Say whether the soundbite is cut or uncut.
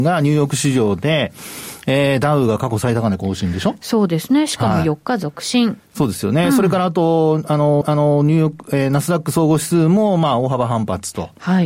cut